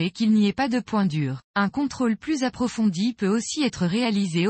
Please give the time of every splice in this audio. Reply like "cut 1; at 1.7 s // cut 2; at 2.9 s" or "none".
cut 1; at 1.5 s